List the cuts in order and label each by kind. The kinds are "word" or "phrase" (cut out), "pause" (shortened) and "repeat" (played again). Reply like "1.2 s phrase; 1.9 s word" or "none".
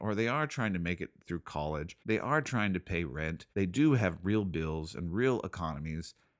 2.0 s pause; 3.5 s pause